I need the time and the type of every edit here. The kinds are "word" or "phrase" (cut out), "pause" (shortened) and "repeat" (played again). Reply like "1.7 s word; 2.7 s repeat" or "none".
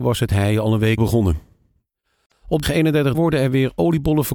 1.0 s word; 2.6 s word; 3.1 s word

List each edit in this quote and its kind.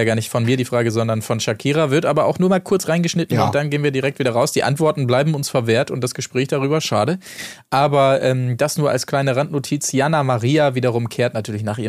none

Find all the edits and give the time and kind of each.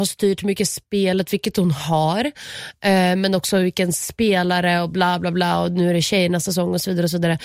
none

